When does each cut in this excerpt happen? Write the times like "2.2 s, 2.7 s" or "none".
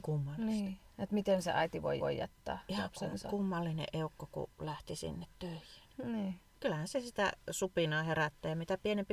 2.0 s